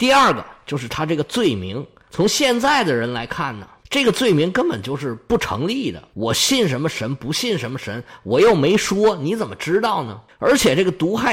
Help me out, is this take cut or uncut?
uncut